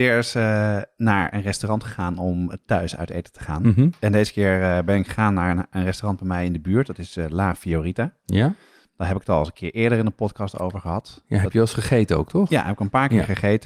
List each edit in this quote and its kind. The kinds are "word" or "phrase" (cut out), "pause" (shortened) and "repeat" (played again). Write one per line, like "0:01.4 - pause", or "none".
none